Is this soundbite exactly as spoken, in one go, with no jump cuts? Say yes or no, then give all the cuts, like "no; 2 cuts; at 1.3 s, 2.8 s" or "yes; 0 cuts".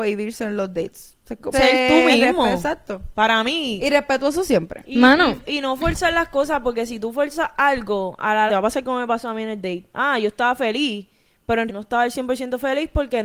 no; 3 cuts; at 1.5 s, 8.5 s, 11.7 s